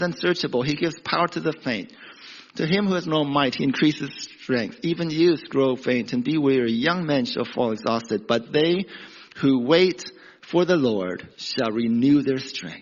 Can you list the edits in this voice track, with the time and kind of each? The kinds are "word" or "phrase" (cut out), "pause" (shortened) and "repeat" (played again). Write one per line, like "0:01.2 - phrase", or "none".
0:11.3 - pause